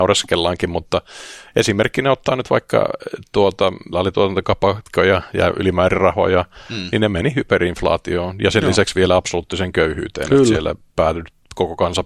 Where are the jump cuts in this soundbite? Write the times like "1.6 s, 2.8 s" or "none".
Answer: 3.9 s